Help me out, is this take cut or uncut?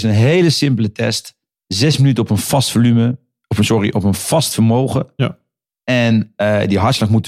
uncut